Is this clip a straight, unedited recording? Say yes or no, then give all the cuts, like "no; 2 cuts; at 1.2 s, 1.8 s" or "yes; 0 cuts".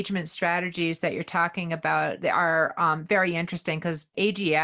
yes; 0 cuts